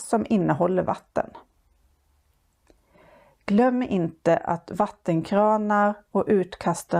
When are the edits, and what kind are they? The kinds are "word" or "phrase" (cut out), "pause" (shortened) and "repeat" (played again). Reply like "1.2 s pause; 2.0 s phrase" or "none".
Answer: none